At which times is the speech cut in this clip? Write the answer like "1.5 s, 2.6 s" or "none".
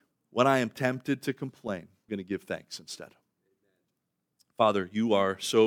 2.1 s

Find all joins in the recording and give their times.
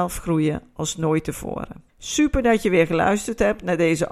1.9 s

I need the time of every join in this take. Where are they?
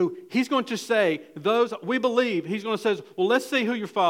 none

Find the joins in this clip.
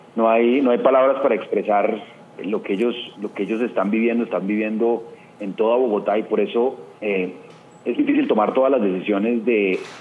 2.4 s, 3.1 s, 7.0 s, 8.0 s

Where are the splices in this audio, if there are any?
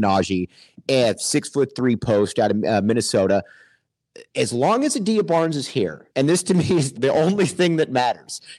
6.1 s, 6.9 s

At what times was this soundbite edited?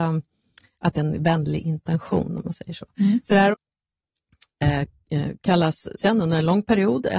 0.9 s, 3.5 s, 6.0 s

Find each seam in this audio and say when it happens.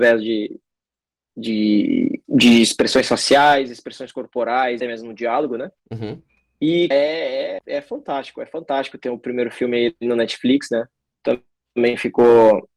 2.2 s, 4.8 s, 5.8 s, 6.9 s, 7.6 s

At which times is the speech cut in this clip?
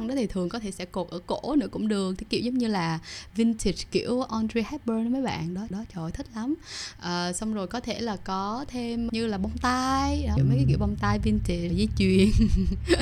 5.7 s, 9.1 s, 10.4 s, 11.7 s

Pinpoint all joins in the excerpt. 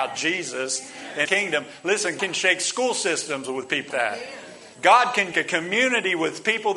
1.3 s, 2.2 s, 3.9 s, 4.7 s, 5.3 s

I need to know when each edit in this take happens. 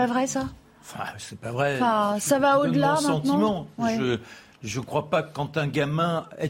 none

